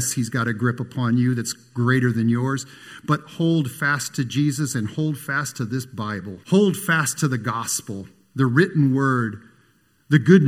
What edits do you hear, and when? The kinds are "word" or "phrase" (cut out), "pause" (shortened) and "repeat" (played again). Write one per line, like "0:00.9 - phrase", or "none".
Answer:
0:06.4 - pause